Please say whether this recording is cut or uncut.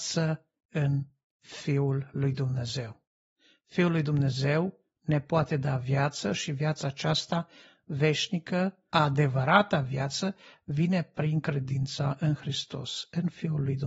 uncut